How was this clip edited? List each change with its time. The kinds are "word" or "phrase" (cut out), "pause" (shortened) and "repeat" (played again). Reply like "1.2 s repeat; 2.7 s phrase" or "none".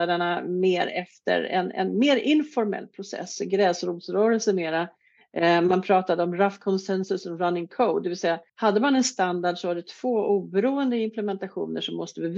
8.5 s pause